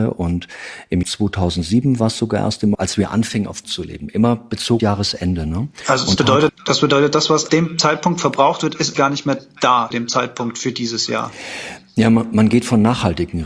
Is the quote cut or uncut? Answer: cut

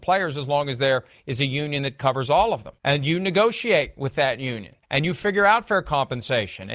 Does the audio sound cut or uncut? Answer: cut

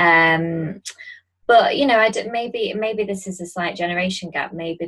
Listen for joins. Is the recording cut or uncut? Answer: uncut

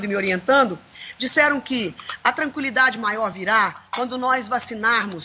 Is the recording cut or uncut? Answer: uncut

